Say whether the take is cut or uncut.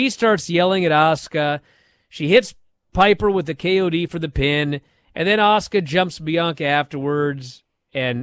uncut